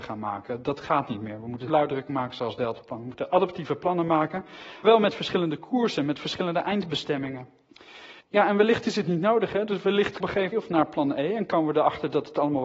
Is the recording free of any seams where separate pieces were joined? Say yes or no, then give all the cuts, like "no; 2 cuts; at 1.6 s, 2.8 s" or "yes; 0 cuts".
no; 5 cuts; at 1.7 s, 4.8 s, 8.2 s, 10.2 s, 10.5 s